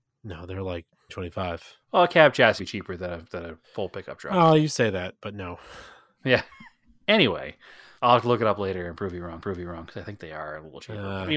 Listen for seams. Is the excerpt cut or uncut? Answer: cut